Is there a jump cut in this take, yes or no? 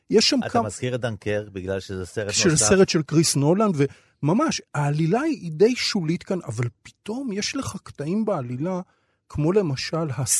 no